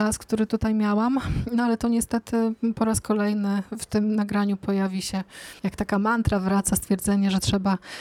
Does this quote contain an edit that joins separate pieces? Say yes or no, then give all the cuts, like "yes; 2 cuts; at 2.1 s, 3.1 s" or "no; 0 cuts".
yes; 1 cut; at 5.6 s